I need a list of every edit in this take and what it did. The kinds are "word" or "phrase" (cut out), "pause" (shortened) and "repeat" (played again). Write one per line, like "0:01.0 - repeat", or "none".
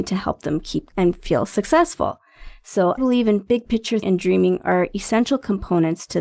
0:00.9 - word
0:03.0 - word
0:04.0 - word